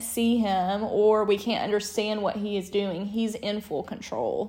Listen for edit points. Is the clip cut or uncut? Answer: uncut